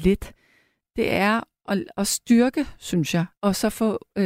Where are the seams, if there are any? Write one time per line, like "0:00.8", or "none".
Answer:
0:03.3